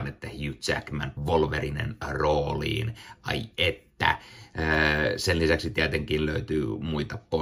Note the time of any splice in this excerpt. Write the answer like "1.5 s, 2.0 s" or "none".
1.2 s

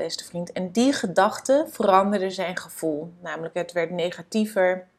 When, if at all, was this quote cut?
none

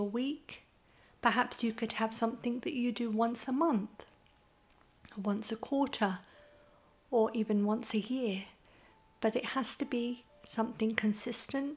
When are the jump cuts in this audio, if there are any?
none

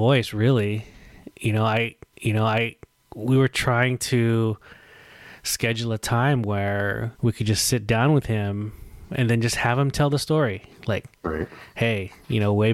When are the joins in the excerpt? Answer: 2.1 s, 7.1 s

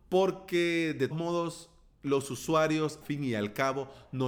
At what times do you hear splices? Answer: 1.1 s, 3.0 s

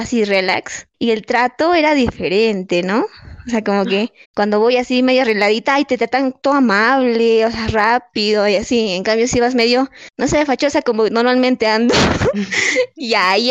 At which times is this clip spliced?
0.9 s, 4.2 s, 10.1 s

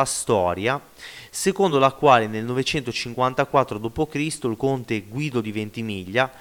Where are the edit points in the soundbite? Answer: none

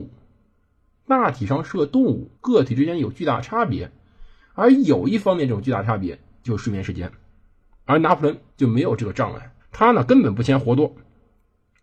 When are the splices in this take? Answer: 2.3 s, 8.5 s, 9.6 s

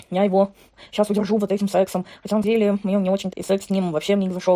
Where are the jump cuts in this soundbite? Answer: 2.4 s, 3.3 s

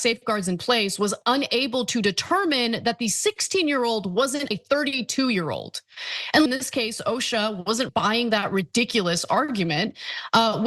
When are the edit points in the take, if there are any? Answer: 4.5 s, 6.5 s, 7.9 s

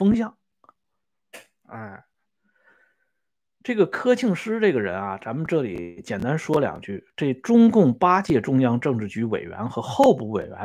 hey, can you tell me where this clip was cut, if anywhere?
none

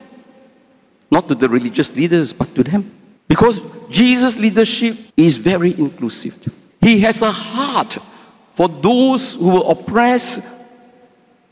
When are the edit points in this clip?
3.2 s, 5.1 s, 6.7 s

